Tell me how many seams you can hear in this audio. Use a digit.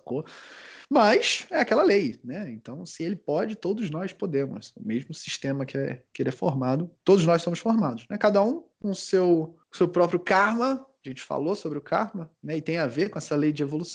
3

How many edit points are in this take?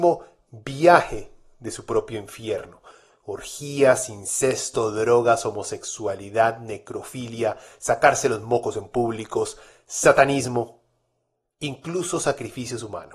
0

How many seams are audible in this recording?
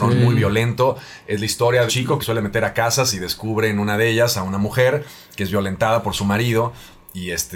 2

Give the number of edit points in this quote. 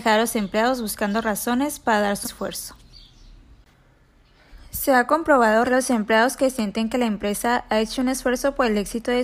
2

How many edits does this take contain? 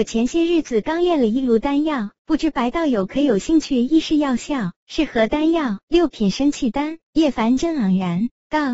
1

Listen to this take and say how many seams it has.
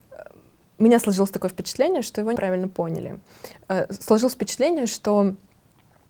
1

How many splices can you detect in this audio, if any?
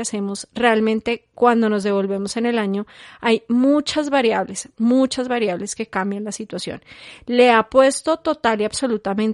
0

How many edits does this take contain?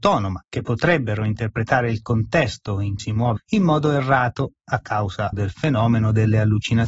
3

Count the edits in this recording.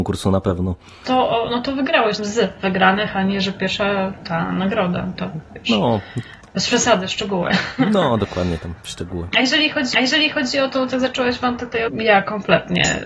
3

